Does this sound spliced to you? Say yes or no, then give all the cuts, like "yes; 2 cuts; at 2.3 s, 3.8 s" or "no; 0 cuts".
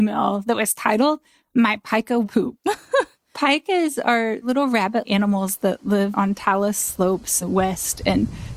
yes; 3 cuts; at 2.2 s, 5.0 s, 7.4 s